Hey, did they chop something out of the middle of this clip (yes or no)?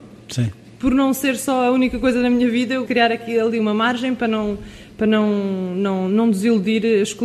yes